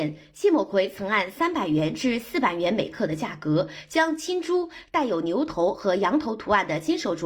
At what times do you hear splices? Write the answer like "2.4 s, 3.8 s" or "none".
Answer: none